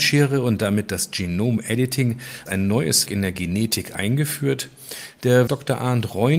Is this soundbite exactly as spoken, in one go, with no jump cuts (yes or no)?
no